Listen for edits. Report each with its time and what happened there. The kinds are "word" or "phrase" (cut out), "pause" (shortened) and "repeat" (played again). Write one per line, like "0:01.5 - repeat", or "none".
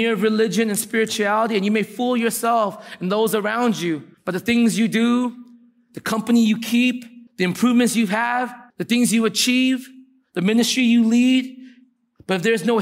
0:04.1 - pause
0:07.3 - pause
0:08.7 - pause